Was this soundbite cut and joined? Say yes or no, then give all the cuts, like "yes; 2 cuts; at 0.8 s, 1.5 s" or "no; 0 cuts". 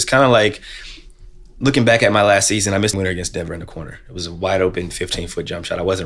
yes; 1 cut; at 2.9 s